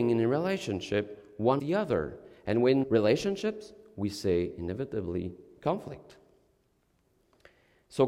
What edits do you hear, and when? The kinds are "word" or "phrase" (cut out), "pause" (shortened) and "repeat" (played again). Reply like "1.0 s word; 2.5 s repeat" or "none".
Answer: 1.6 s word; 2.8 s phrase